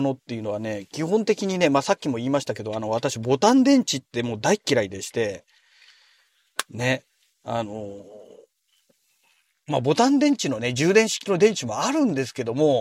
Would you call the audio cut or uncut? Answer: uncut